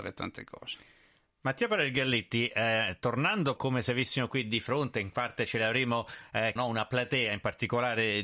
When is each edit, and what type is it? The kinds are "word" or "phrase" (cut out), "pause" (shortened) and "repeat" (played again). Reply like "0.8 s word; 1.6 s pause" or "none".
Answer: 3.6 s word; 6.6 s phrase

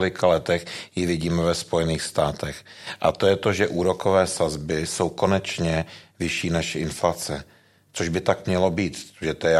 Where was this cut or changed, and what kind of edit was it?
none

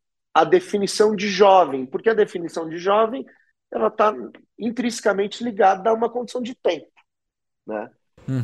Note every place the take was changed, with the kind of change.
none

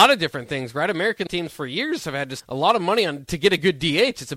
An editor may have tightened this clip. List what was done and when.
1.3 s word; 2.4 s word

